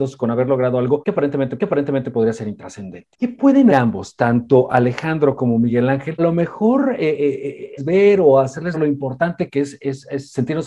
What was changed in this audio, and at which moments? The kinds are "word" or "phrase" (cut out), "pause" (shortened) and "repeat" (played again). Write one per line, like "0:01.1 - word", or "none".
0:01.6 - repeat
0:03.1 - pause
0:03.7 - word
0:06.2 - word
0:07.8 - word
0:08.7 - word

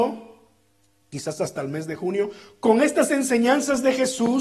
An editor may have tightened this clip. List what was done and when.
none

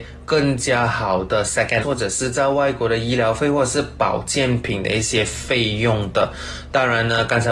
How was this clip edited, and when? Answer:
0:01.8 - word

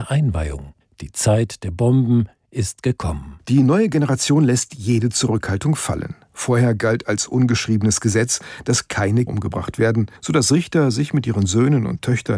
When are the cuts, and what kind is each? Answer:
0:09.3 - word
0:10.2 - pause

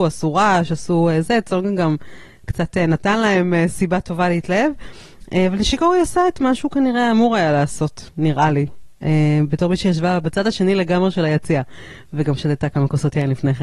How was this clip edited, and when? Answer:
none

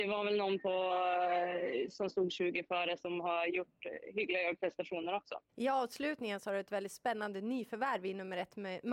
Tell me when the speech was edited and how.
0:05.5 - pause

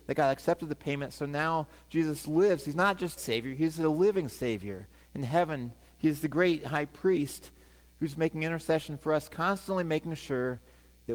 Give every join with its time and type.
0:03.2 - phrase

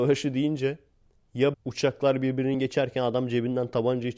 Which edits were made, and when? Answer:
0:01.5 - word
0:02.5 - word

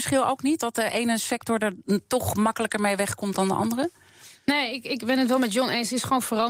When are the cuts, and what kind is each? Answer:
none

